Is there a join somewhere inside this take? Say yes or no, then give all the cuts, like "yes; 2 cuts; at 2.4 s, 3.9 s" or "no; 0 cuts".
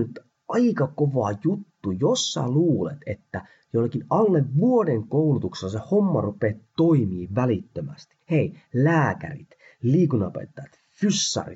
yes; 1 cut; at 8.2 s